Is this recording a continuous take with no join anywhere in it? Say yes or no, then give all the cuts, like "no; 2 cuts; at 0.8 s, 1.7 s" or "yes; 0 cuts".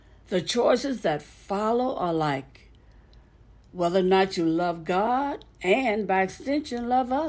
yes; 0 cuts